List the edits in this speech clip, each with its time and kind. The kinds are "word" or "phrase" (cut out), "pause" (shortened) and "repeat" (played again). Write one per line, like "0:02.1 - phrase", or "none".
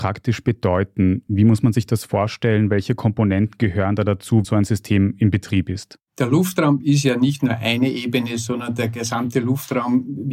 0:04.4 - word
0:06.1 - pause